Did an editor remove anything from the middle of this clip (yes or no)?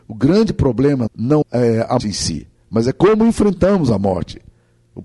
yes